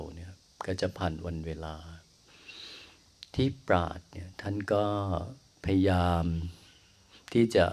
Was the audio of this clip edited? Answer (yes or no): no